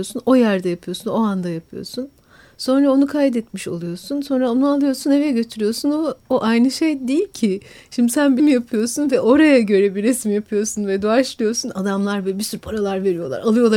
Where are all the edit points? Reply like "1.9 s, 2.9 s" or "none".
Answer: 6.2 s, 8.4 s